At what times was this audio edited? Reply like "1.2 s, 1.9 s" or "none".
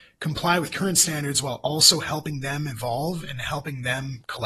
none

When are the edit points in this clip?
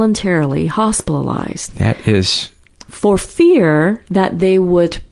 2.7 s

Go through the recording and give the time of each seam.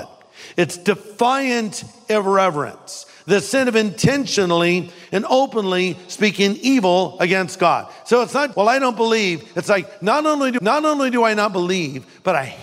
8.5 s, 10.6 s

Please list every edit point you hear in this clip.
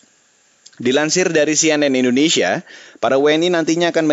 none

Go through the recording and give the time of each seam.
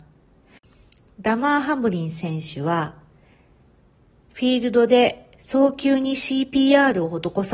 none

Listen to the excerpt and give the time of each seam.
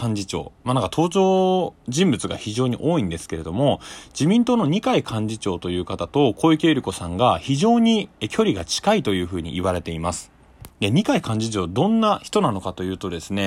10.7 s

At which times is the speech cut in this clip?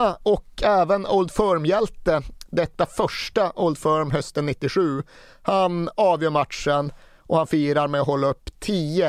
none

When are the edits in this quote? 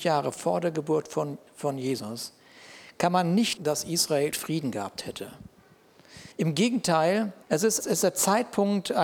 3.6 s, 4.3 s, 6.3 s, 7.4 s, 7.8 s

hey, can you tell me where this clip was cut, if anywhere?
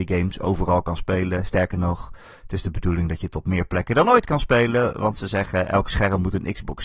none

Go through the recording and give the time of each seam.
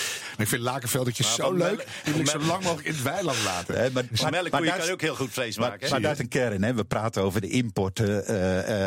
6.2 s

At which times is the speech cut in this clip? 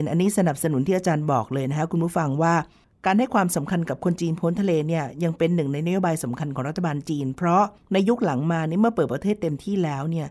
none

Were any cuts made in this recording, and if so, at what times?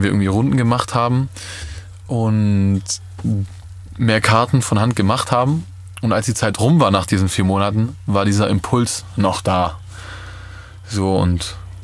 none

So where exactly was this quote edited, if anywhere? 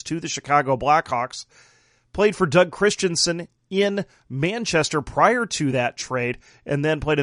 none

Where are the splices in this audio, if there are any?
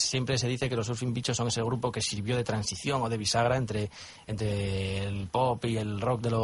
none

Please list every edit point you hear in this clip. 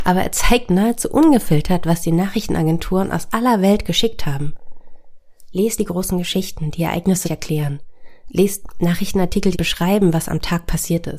5.8 s, 7.2 s, 9.5 s

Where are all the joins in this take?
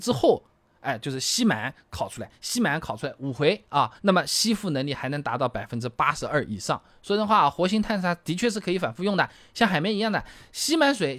4.0 s

